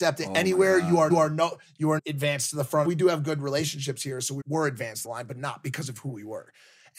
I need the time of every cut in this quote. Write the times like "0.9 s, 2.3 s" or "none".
1.1 s, 2.0 s, 2.9 s, 4.4 s, 5.0 s